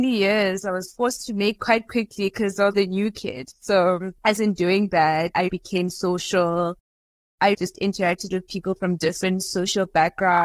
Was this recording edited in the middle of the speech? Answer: yes; 5 cuts; at 1.5 s, 2.7 s, 4.4 s, 5.5 s, 7.5 s

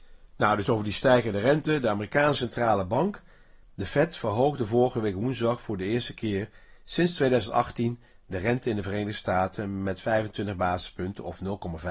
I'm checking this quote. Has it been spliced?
no; 0 cuts

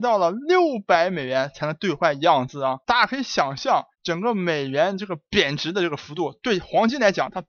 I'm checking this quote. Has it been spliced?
yes; 2 cuts; at 2.8 s, 3.9 s

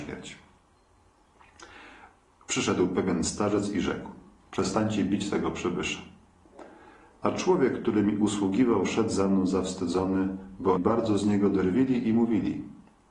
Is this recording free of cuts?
no; 1 cut; at 10.8 s

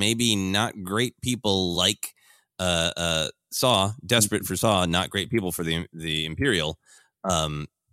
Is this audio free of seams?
yes; 0 cuts

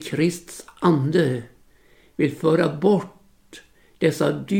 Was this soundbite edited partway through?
no; 0 cuts

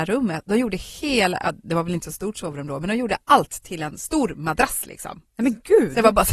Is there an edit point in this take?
no; 0 cuts

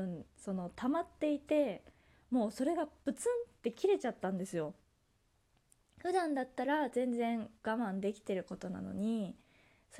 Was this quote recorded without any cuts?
yes; 0 cuts

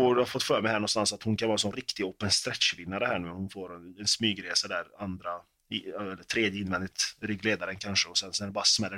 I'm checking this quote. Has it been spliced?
no; 0 cuts

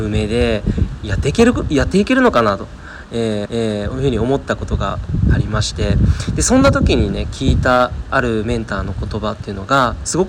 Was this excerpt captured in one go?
no; 1 cut; at 3.5 s

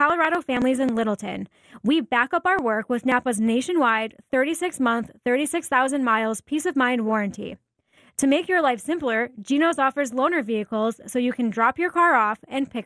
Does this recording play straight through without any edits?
yes; 0 cuts

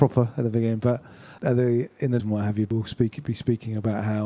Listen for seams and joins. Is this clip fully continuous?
no; 3 cuts; at 1.4 s, 2.2 s, 2.7 s

